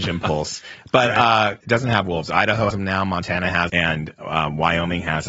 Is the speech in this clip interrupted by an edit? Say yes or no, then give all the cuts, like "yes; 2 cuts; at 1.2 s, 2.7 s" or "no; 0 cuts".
yes; 3 cuts; at 1.6 s, 2.7 s, 3.7 s